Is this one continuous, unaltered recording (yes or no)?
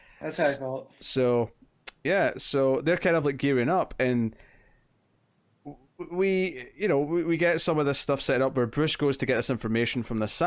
yes